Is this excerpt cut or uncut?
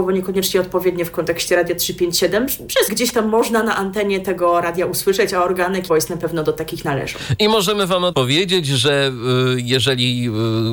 cut